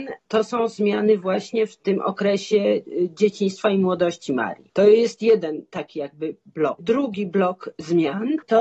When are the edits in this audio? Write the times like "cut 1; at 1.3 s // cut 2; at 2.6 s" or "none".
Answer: none